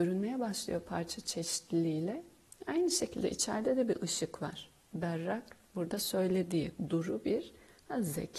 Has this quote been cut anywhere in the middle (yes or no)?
no